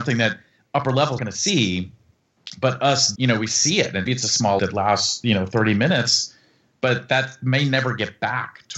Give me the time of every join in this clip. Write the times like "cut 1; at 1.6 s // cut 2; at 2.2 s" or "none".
cut 1; at 1.2 s // cut 2; at 3.2 s // cut 3; at 4.1 s // cut 4; at 4.6 s